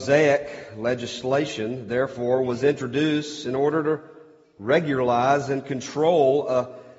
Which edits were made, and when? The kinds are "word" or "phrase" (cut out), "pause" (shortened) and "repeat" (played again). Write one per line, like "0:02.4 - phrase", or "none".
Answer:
none